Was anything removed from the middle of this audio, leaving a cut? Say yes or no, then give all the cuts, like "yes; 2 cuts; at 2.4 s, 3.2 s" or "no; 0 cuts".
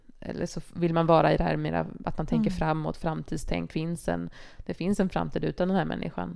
yes; 1 cut; at 3.7 s